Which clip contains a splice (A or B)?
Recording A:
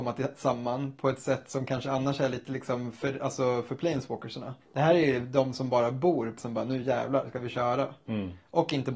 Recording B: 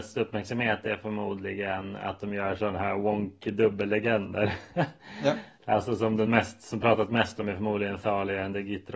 A